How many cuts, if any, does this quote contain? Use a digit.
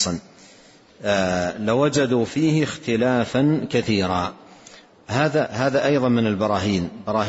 1